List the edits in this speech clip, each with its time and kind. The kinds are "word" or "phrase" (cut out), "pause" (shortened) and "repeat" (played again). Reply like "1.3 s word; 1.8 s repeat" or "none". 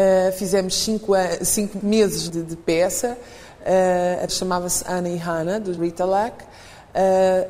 1.8 s word; 2.3 s word; 4.3 s word; 5.8 s word